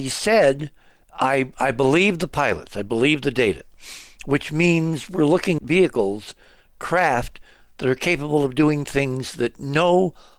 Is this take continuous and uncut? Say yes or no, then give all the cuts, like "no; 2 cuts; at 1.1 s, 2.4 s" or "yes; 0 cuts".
no; 2 cuts; at 1.0 s, 5.6 s